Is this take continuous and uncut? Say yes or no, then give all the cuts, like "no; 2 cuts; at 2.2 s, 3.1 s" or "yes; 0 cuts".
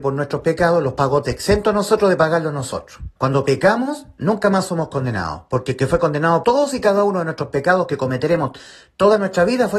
no; 3 cuts; at 1.2 s, 3.2 s, 6.4 s